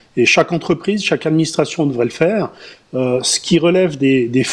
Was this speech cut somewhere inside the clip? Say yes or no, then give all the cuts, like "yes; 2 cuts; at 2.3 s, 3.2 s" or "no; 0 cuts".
no; 0 cuts